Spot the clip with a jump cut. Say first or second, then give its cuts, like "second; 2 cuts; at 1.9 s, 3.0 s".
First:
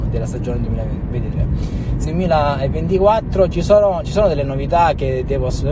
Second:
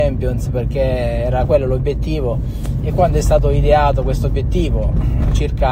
first; 1 cut; at 2.0 s